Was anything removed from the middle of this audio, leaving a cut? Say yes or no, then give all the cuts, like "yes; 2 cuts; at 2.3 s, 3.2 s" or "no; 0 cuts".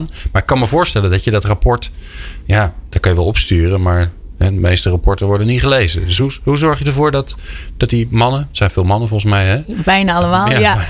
no; 0 cuts